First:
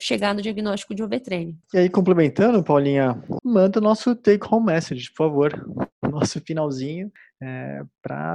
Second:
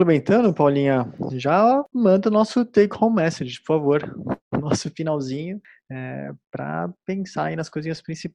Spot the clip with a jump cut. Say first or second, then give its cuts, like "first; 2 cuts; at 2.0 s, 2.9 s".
first; 2 cuts; at 1.6 s, 3.4 s